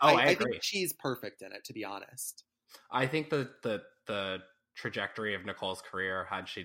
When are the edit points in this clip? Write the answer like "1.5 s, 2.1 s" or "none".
none